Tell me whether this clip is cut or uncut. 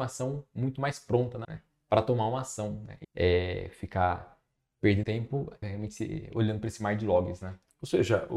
cut